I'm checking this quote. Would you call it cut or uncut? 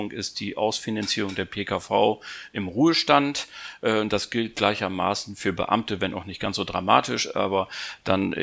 uncut